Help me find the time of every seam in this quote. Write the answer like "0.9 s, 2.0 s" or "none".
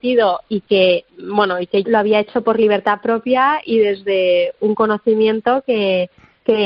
1.8 s